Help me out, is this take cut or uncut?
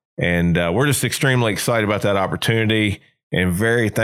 uncut